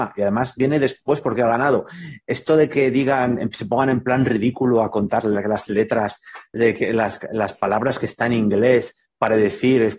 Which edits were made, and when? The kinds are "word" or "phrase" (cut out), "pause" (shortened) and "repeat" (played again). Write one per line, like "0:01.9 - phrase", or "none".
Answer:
0:05.2 - word